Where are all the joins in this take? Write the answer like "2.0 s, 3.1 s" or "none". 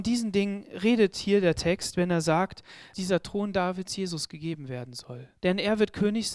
2.9 s, 5.4 s

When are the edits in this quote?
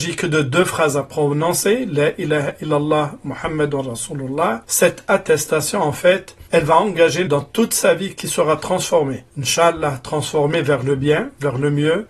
4.6 s, 6.5 s, 7.3 s, 9.3 s

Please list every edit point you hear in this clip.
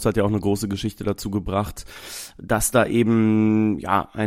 none

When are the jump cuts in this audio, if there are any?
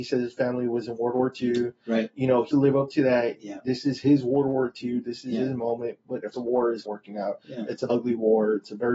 2.5 s, 6.3 s, 6.9 s, 7.9 s

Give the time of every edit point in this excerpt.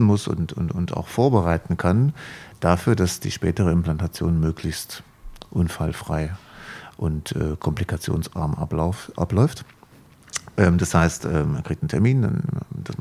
none

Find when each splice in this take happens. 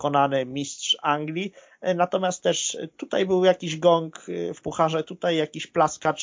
4.6 s

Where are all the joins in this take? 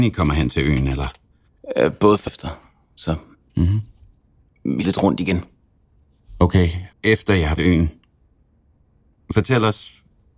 2.3 s, 4.8 s, 6.9 s, 7.6 s

